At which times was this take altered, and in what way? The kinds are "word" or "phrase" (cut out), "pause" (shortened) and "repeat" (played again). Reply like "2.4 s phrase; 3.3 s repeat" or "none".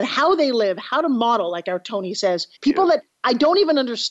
2.6 s pause